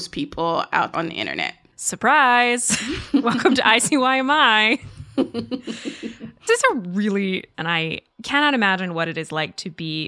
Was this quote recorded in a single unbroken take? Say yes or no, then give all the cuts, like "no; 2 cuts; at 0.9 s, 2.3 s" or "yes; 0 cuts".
no; 4 cuts; at 0.9 s, 6.5 s, 7.5 s, 8.1 s